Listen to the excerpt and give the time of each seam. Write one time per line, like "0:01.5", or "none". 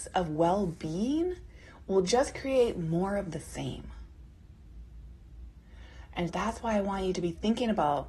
0:06.3